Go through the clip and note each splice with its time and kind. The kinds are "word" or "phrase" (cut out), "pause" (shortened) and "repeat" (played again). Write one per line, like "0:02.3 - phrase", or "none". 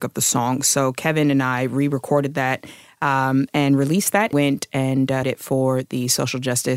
0:04.3 - word
0:05.2 - word